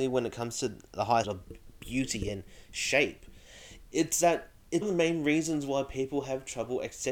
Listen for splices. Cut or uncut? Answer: cut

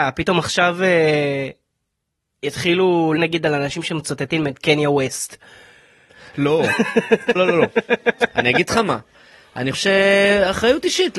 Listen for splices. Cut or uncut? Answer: cut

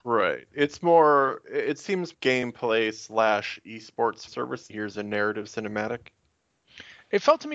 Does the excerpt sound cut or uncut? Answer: cut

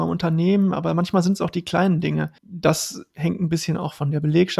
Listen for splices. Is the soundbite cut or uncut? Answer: cut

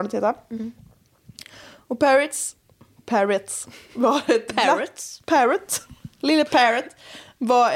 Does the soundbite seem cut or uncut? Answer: uncut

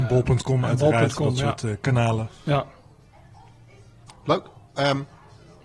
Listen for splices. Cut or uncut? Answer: uncut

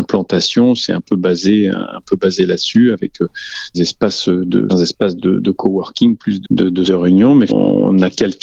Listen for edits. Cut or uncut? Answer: cut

